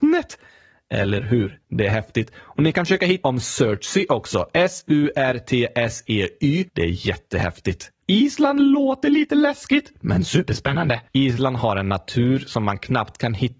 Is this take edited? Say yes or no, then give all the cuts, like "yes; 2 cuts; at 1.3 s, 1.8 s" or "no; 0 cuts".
yes; 5 cuts; at 1.6 s, 2.7 s, 3.2 s, 6.7 s, 11.1 s